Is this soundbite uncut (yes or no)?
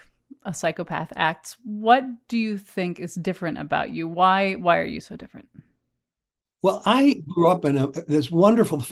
yes